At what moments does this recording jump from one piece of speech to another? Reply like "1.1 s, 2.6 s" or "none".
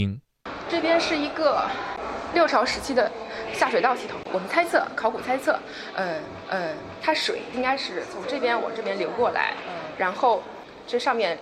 6.5 s